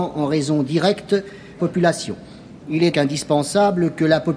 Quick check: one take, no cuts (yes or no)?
no